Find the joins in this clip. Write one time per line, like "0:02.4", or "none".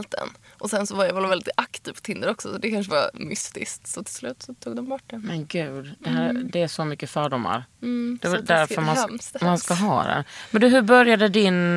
none